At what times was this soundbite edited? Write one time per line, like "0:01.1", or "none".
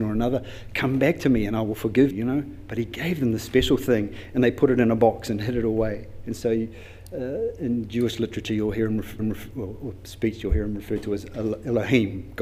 0:02.1
0:09.2